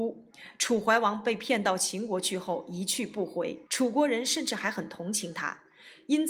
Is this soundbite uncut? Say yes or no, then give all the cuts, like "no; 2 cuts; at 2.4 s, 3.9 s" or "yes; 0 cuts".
no; 1 cut; at 3.7 s